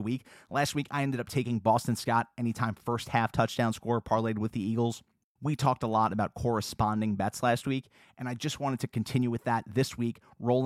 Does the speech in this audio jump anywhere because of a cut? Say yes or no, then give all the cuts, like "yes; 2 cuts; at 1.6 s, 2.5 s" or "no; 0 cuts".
no; 0 cuts